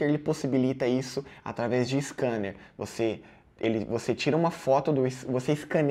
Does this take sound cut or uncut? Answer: uncut